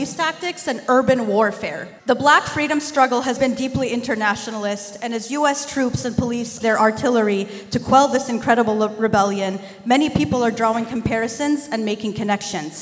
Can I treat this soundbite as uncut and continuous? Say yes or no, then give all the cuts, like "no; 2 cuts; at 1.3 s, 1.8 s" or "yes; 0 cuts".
no; 3 cuts; at 2.0 s, 3.4 s, 6.6 s